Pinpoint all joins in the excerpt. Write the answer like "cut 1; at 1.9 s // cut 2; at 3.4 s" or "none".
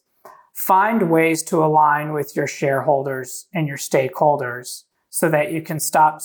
cut 1; at 4.9 s

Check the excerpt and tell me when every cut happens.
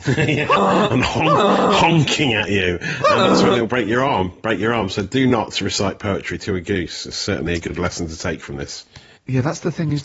none

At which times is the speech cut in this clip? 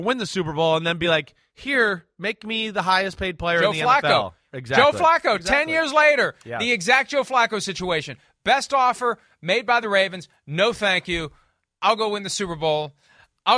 none

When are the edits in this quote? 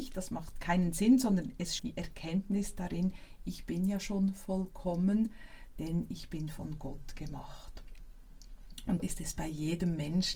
cut 1; at 1.8 s // cut 2; at 9.0 s

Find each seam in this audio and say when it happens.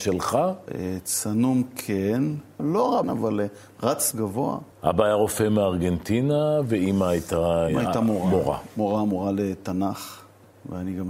cut 1; at 2.6 s // cut 2; at 3.0 s // cut 3; at 4.1 s // cut 4; at 4.7 s

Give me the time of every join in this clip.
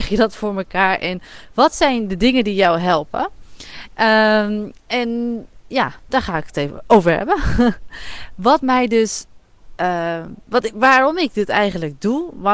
none

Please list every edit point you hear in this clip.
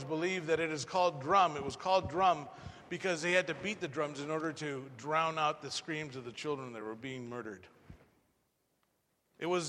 none

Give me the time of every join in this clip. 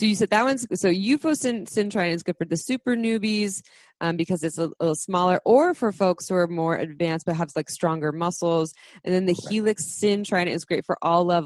none

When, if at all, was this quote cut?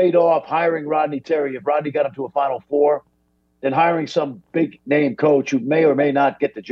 none

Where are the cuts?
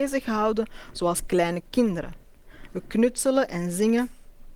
none

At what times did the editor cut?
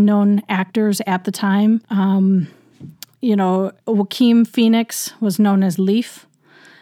cut 1; at 1.8 s // cut 2; at 3.8 s

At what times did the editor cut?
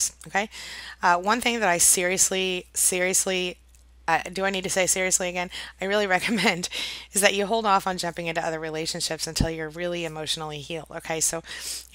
none

